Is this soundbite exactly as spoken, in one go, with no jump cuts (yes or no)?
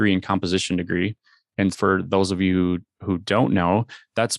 no